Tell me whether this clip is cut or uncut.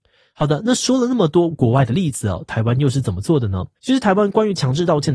cut